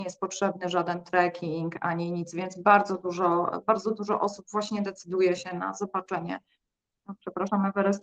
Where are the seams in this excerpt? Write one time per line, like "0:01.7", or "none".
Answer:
none